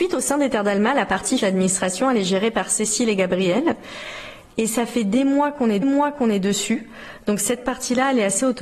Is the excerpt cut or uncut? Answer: cut